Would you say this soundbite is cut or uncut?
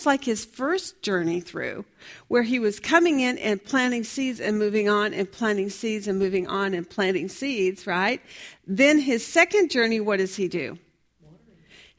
uncut